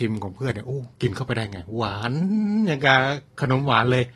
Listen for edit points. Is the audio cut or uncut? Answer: cut